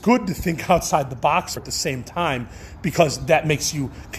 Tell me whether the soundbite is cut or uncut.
cut